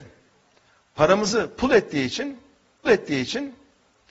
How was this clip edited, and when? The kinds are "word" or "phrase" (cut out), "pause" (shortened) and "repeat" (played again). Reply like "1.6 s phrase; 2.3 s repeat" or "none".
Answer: 2.9 s repeat